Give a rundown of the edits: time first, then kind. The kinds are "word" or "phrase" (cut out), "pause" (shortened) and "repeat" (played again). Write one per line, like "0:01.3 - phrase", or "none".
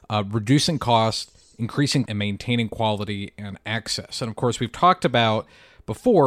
0:02.1 - word